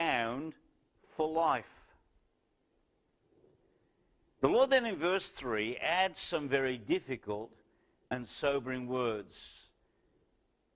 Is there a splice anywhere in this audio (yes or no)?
no